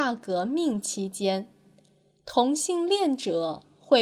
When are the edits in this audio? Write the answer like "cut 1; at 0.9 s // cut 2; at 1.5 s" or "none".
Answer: none